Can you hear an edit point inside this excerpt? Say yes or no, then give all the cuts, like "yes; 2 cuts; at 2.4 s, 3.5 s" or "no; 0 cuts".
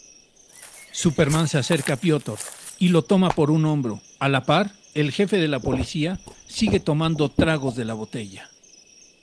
no; 0 cuts